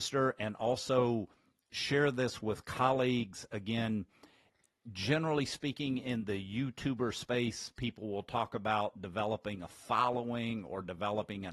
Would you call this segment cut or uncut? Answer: uncut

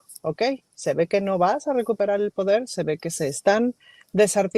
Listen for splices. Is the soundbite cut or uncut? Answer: uncut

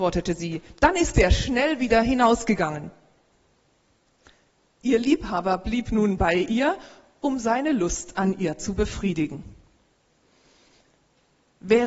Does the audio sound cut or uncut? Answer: uncut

